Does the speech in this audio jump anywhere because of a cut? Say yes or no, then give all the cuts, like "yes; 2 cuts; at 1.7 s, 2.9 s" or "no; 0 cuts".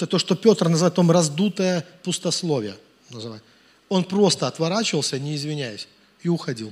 no; 0 cuts